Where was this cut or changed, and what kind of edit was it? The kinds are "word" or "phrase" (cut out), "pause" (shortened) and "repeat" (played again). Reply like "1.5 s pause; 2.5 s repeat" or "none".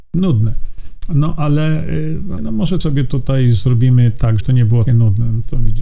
2.4 s word; 2.8 s word; 4.4 s word; 4.9 s word